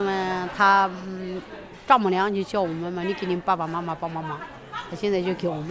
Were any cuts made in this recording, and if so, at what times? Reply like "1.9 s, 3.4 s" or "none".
none